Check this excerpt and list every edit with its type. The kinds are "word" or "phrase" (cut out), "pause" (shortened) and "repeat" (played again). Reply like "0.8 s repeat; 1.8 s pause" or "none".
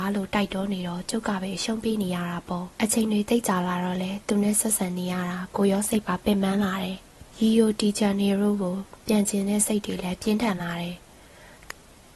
2.7 s pause; 7.3 s pause